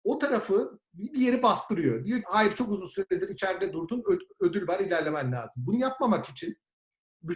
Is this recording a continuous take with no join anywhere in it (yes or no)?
no